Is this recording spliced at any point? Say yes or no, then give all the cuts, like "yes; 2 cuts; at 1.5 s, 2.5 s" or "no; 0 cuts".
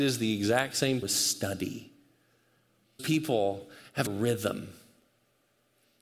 yes; 3 cuts; at 1.0 s, 3.0 s, 4.1 s